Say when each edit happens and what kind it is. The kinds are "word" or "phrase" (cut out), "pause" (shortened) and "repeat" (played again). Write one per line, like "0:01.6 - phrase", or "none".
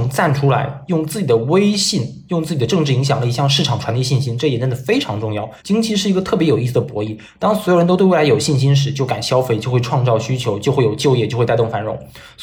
0:05.6 - pause